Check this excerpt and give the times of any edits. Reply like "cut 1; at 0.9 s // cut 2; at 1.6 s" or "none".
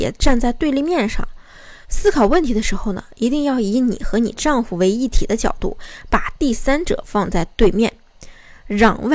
cut 1; at 1.8 s

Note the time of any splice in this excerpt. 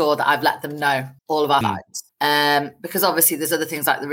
cut 1; at 1.2 s // cut 2; at 1.6 s // cut 3; at 2.1 s

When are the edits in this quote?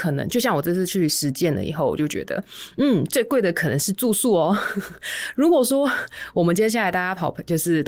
none

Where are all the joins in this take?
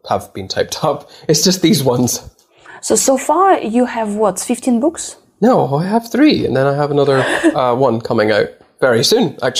none

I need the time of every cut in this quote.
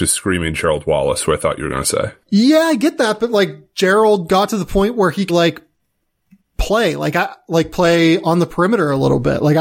cut 1; at 2.2 s // cut 2; at 5.3 s

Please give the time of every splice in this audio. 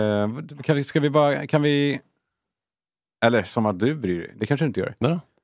none

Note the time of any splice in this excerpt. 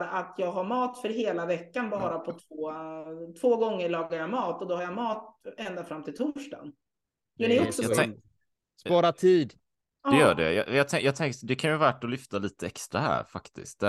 none

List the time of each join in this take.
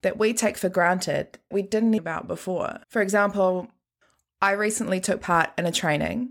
cut 1; at 1.5 s // cut 2; at 2.0 s // cut 3; at 2.8 s

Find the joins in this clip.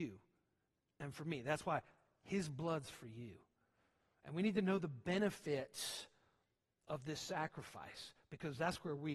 none

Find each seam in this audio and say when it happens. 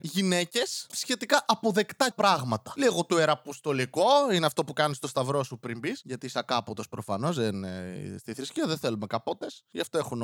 cut 1; at 0.9 s // cut 2; at 2.1 s

